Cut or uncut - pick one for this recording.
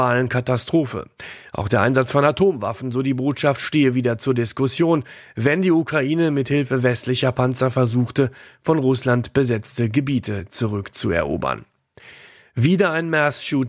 uncut